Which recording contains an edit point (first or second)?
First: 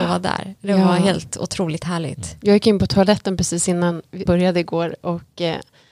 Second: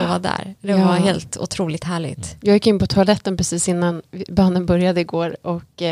first